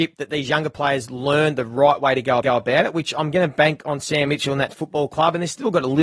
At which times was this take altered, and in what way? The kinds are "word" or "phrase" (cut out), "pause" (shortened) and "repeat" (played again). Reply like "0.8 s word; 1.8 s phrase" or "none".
2.4 s repeat